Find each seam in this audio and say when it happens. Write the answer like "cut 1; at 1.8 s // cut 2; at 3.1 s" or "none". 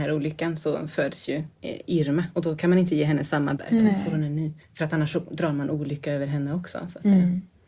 cut 1; at 3.6 s // cut 2; at 4.6 s